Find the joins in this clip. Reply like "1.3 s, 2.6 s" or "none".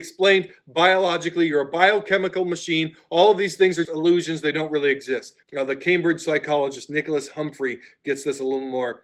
3.8 s, 5.4 s

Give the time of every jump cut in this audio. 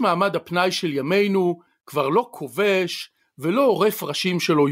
none

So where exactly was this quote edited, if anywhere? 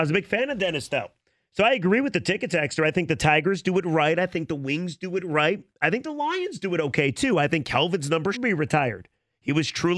1.3 s, 5.7 s, 8.3 s

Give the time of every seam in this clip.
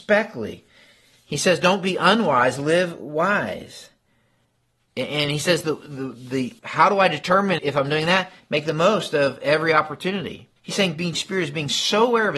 6.6 s, 7.6 s, 10.6 s, 11.1 s

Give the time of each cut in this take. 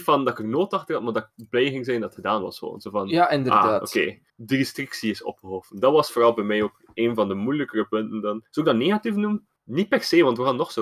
4.3 s, 8.5 s, 9.6 s

